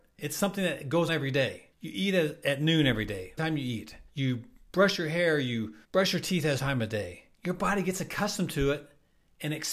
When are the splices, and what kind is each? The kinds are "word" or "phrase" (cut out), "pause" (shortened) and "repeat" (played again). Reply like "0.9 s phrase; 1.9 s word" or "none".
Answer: 1.1 s word; 1.7 s pause; 3.4 s word; 4.1 s pause; 5.8 s pause; 6.6 s word; 7.3 s pause